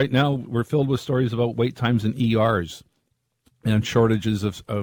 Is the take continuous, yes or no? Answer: yes